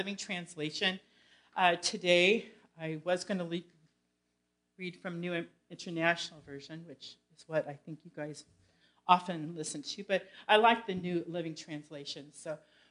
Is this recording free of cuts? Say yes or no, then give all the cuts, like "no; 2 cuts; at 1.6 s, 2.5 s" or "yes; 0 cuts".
yes; 0 cuts